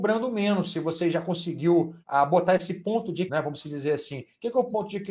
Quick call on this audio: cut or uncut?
cut